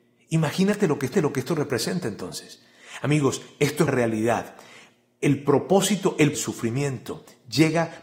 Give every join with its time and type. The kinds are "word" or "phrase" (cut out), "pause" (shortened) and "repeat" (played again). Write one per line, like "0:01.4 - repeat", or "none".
0:01.1 - repeat
0:03.9 - word
0:06.3 - phrase